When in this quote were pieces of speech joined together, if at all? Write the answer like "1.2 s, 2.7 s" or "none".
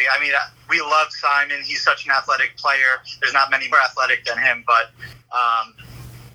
3.7 s